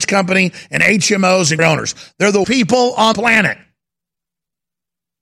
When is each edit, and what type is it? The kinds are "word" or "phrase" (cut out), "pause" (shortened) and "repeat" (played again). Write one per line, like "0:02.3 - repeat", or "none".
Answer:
0:01.6 - word
0:02.4 - word
0:03.1 - word